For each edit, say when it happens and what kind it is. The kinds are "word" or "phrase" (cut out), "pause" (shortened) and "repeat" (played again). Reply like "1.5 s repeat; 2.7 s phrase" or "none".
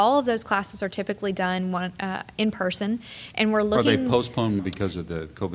4.6 s word